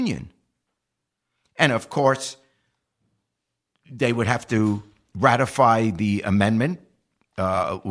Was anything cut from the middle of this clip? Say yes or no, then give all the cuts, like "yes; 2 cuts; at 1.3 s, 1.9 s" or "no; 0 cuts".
no; 0 cuts